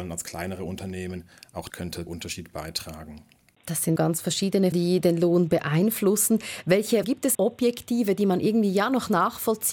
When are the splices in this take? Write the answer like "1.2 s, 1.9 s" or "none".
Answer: 1.7 s, 2.1 s, 4.0 s, 4.7 s, 7.0 s, 7.3 s